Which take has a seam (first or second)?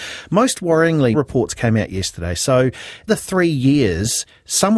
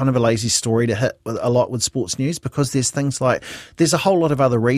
first